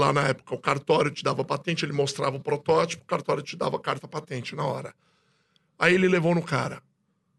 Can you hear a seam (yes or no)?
no